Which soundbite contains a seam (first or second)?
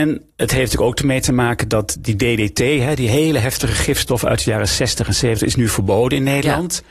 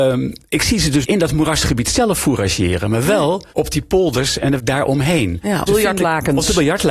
second